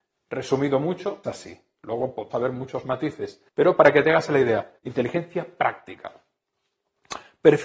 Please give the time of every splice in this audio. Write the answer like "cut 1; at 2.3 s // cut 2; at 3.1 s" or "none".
cut 1; at 1.2 s // cut 2; at 2.3 s // cut 3; at 3.5 s // cut 4; at 4.8 s